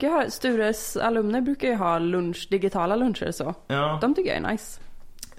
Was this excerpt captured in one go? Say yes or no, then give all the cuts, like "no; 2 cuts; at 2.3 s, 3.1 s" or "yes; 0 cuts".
yes; 0 cuts